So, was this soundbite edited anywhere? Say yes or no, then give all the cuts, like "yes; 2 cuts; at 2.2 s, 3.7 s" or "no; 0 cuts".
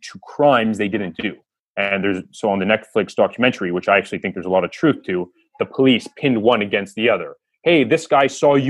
no; 0 cuts